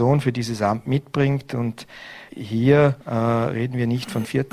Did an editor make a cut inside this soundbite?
yes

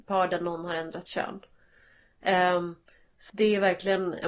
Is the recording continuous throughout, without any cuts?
no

